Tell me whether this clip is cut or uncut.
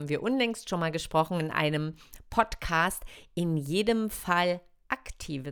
uncut